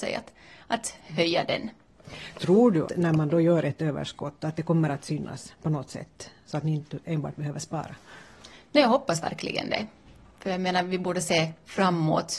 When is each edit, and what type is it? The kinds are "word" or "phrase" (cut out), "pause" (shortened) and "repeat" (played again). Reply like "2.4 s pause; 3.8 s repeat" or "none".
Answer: 2.9 s word